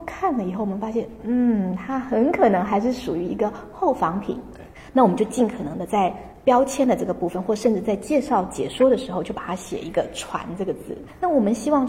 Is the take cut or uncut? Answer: uncut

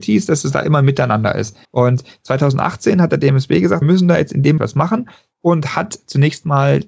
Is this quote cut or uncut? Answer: cut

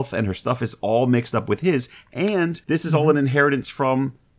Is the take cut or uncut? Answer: cut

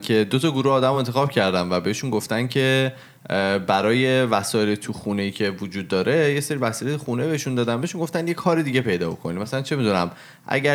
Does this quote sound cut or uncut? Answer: uncut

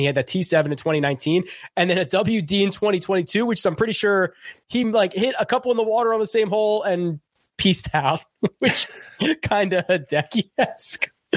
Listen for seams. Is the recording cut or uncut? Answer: uncut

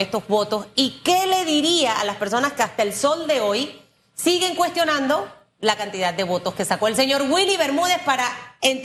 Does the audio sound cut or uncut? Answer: uncut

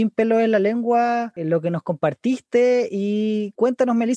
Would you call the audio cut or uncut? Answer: uncut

